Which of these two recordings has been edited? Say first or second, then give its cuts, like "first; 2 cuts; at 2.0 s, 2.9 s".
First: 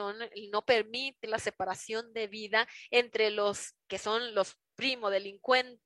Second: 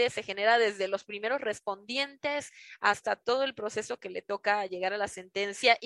first; 1 cut; at 1.2 s